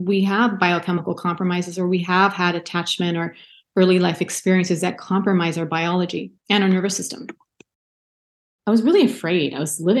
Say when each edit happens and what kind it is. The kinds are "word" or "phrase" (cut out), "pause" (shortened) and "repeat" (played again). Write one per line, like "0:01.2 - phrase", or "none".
0:06.4 - pause